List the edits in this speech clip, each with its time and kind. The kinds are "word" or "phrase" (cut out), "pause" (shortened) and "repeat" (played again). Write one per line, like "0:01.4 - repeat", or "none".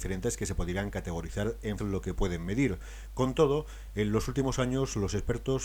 0:01.8 - phrase